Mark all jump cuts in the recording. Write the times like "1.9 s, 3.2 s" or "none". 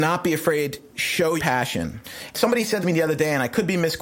0.9 s, 1.4 s, 2.8 s